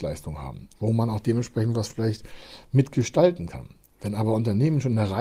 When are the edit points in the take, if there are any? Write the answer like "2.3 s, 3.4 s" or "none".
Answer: none

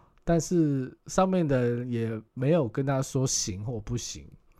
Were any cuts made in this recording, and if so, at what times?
1.0 s, 2.3 s

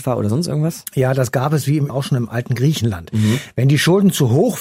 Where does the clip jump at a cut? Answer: 1.9 s

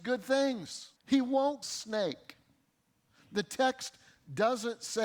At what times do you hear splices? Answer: 1.0 s, 1.6 s

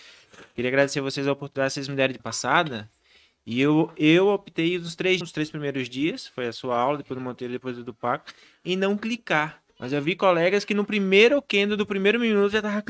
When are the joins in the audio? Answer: 2.2 s, 5.2 s, 9.7 s

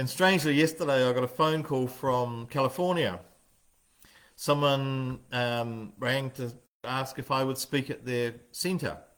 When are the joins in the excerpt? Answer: none

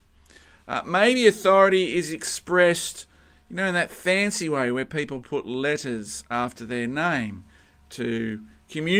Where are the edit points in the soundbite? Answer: none

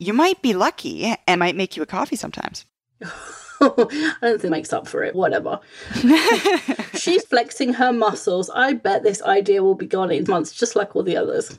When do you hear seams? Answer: 1.4 s, 4.5 s, 5.1 s, 7.2 s, 10.3 s

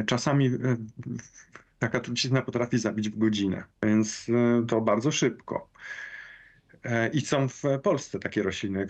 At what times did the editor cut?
3.7 s

